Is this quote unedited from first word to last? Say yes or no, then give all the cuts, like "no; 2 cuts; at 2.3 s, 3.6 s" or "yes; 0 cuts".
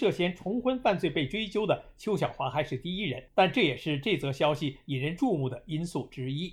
no; 1 cut; at 3.3 s